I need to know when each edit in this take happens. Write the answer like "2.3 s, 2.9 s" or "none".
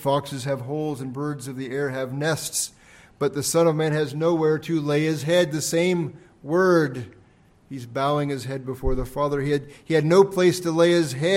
none